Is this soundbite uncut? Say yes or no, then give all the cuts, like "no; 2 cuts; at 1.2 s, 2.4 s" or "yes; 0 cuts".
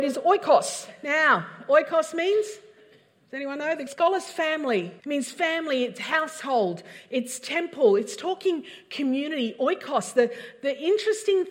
no; 2 cuts; at 3.9 s, 5.0 s